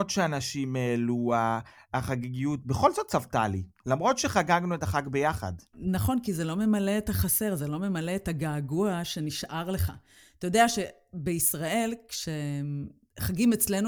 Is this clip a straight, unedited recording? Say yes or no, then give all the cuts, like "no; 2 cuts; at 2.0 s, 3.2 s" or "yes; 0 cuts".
yes; 0 cuts